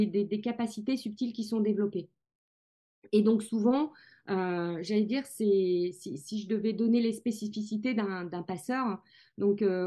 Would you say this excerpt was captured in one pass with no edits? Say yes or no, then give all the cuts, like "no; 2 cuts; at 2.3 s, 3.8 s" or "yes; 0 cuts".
yes; 0 cuts